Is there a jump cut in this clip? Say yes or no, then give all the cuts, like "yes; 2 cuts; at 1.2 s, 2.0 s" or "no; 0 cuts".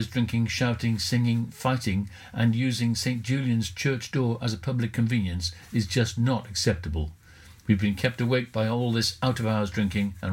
no; 0 cuts